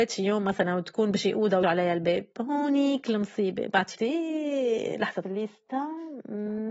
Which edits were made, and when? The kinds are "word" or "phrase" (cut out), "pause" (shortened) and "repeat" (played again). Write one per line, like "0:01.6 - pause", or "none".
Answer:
0:01.6 - word
0:03.9 - word
0:05.2 - word